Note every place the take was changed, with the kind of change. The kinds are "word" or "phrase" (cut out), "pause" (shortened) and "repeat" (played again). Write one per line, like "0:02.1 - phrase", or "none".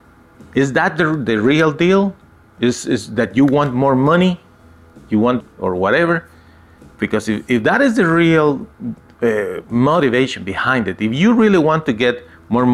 0:05.4 - word